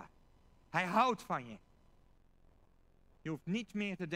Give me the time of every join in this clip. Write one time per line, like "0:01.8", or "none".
none